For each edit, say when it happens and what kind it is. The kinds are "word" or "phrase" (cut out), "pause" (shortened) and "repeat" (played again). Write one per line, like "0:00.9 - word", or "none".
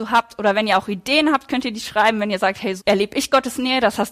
0:02.8 - word